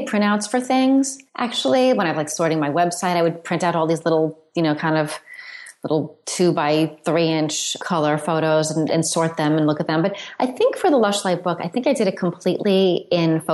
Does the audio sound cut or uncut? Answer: cut